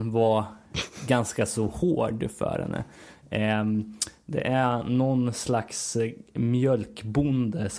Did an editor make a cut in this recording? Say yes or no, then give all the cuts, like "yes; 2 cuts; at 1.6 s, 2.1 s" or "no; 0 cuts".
no; 0 cuts